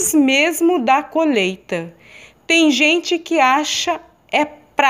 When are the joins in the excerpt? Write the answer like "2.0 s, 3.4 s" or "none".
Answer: none